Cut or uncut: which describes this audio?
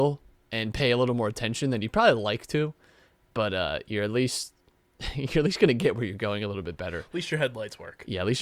uncut